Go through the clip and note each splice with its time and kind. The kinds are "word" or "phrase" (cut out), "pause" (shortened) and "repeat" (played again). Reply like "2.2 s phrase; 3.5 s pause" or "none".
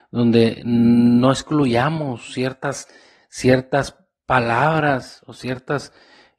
none